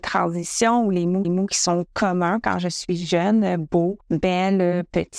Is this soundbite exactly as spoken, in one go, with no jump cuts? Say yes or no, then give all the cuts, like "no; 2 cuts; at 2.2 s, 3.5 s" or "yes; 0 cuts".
no; 2 cuts; at 1.2 s, 4.0 s